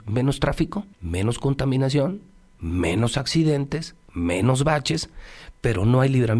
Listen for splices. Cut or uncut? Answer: cut